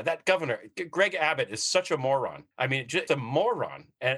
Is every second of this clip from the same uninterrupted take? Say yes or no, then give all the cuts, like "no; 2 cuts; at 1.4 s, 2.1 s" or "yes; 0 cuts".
no; 2 cuts; at 2.5 s, 3.1 s